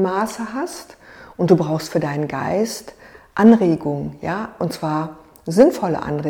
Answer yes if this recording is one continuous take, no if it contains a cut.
yes